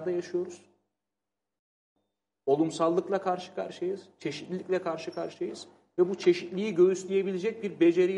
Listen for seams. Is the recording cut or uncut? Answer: uncut